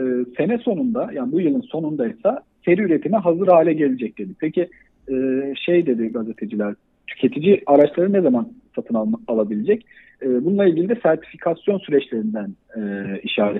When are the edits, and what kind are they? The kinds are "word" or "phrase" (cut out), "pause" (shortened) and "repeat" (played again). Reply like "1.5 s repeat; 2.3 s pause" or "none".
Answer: none